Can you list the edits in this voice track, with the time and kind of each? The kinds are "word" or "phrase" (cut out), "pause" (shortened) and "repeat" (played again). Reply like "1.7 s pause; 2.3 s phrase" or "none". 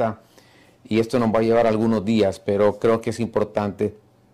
none